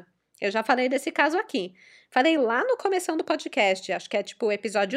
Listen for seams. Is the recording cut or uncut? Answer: uncut